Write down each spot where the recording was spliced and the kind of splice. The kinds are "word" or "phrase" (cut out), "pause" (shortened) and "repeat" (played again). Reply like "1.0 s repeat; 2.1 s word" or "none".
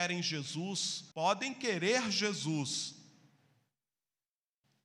1.1 s pause